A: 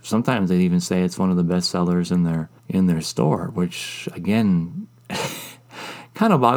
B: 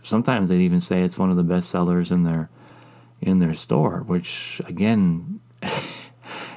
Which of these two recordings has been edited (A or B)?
A